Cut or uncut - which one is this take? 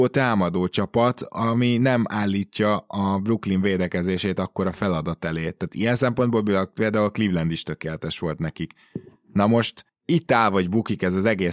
uncut